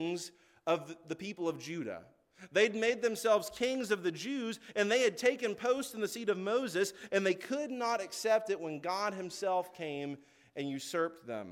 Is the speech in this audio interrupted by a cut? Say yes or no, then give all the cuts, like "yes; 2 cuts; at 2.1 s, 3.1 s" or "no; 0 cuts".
no; 0 cuts